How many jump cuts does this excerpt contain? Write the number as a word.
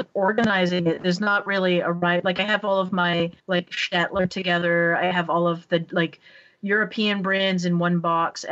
one